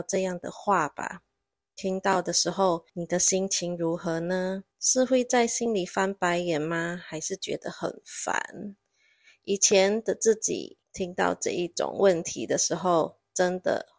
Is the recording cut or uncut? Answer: cut